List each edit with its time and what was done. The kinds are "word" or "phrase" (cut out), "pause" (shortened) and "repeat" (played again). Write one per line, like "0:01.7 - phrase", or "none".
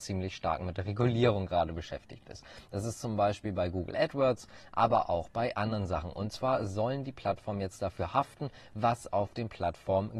none